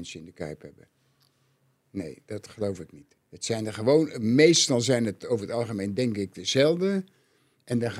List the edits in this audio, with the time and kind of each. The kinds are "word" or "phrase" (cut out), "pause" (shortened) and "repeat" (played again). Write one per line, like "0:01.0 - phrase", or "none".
0:03.2 - pause